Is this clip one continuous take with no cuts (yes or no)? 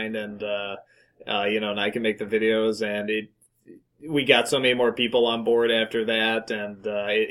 yes